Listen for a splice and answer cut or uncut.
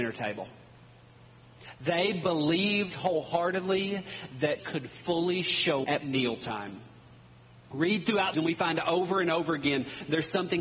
cut